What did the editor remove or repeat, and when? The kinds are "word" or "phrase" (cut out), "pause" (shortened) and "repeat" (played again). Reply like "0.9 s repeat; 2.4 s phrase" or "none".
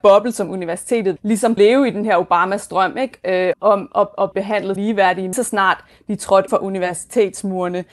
1.2 s word; 1.6 s word; 3.5 s word; 4.3 s word; 4.8 s word; 5.3 s word; 6.5 s word

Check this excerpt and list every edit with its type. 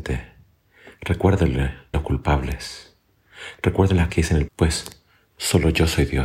1.9 s word; 4.1 s word; 4.5 s word

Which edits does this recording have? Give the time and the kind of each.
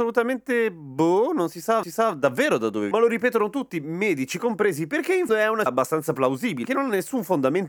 1.8 s repeat; 2.9 s word; 5.3 s word; 5.7 s word; 6.6 s word

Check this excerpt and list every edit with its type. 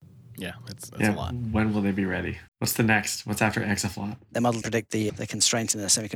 2.5 s pause; 4.6 s word; 5.1 s word

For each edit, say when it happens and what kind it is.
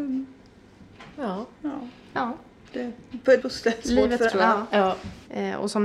3.4 s word; 3.8 s word; 4.3 s word

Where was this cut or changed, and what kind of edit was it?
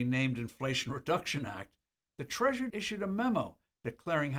2.7 s word

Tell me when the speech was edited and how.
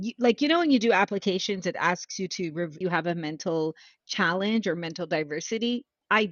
2.8 s phrase

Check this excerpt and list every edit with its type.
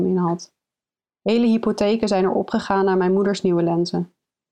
none

